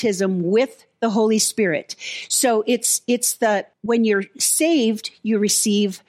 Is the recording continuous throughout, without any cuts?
no; 1 cut; at 3.7 s

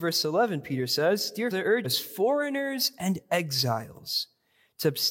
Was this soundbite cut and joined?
yes; 2 cuts; at 1.5 s, 1.8 s

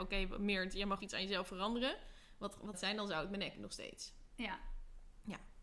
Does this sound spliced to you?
yes; 3 cuts; at 1.0 s, 2.7 s, 3.5 s

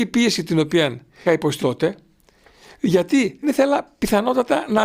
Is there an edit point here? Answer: yes; 3 cuts; at 1.3 s, 1.6 s, 3.4 s

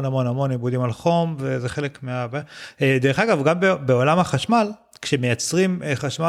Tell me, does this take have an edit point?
no; 0 cuts

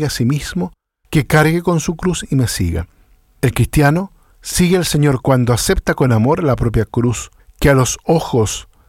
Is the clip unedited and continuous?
yes; 0 cuts

